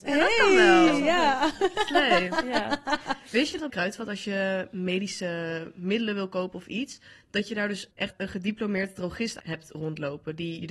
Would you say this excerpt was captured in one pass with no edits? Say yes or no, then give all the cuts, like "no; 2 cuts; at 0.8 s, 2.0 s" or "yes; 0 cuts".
no; 1 cut; at 3.7 s